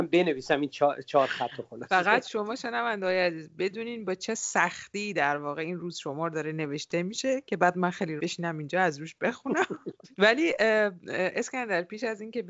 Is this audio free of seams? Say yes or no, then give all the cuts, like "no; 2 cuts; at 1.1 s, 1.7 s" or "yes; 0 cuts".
no; 1 cut; at 8.2 s